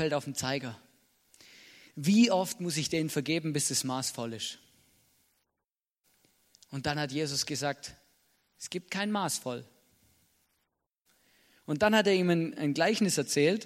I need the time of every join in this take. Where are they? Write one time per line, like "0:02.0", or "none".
none